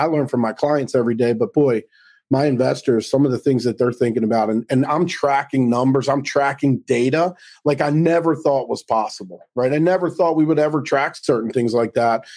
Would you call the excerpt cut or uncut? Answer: uncut